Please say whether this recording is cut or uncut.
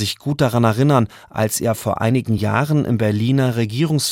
uncut